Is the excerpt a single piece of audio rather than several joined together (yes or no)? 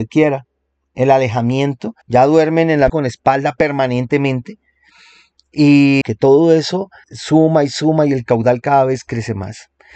no